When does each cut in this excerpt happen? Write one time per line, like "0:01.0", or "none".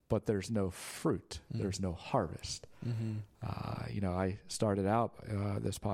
none